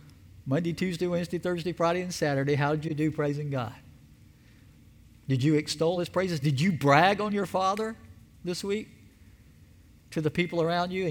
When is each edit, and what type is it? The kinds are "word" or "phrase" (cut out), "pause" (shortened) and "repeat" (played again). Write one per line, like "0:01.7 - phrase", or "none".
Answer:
none